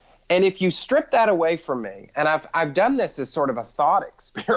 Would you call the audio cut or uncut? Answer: uncut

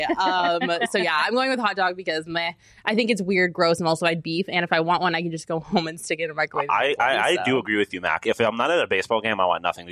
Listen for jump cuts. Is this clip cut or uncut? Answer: uncut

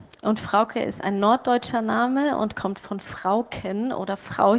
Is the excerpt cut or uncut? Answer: uncut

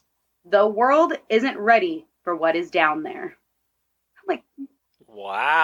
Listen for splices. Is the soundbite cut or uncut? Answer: uncut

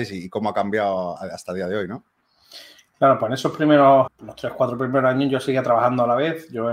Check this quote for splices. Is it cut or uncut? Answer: cut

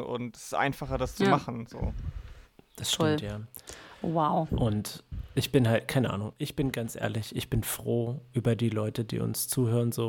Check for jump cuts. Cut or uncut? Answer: uncut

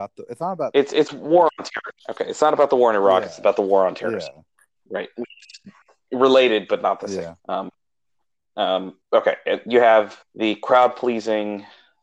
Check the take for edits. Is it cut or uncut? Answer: cut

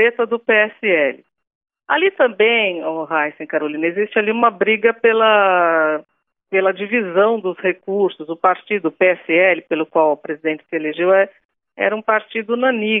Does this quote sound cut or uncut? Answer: uncut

